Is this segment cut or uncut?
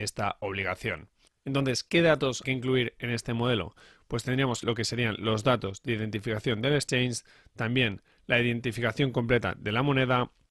cut